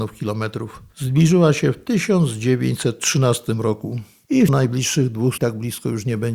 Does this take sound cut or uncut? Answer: cut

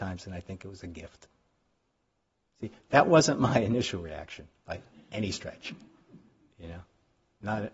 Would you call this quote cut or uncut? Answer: uncut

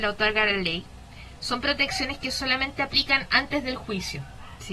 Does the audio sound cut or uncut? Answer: uncut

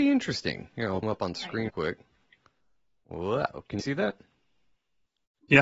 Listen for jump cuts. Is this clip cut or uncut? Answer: cut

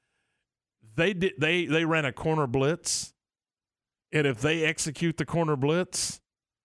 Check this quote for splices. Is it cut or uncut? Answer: uncut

